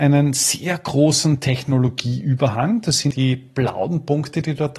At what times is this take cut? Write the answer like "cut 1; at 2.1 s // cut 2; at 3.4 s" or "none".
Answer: cut 1; at 3.1 s